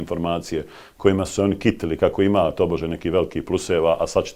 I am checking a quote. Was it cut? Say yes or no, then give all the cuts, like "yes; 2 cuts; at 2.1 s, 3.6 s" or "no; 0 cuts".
no; 0 cuts